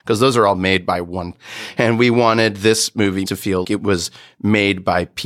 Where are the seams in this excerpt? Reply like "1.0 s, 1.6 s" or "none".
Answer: 1.3 s, 3.2 s, 3.6 s